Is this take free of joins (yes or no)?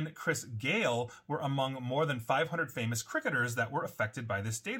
yes